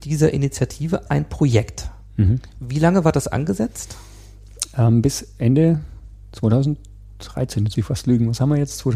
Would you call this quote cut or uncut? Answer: cut